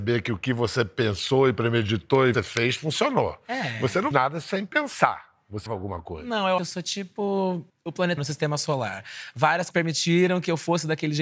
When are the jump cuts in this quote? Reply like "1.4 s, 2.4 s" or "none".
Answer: 2.3 s, 4.1 s, 5.7 s, 6.6 s, 7.7 s, 8.2 s, 9.7 s